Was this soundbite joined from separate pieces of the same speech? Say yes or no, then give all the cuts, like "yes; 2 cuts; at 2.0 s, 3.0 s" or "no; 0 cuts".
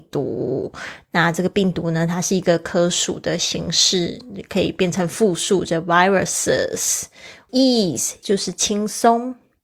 yes; 2 cuts; at 7.5 s, 8.2 s